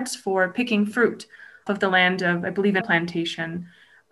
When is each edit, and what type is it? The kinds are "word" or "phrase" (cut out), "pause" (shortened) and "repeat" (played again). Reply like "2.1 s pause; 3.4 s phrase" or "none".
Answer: 1.7 s word; 2.8 s word